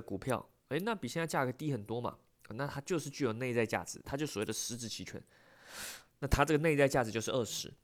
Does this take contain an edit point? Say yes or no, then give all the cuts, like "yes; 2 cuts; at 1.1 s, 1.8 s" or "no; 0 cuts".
no; 0 cuts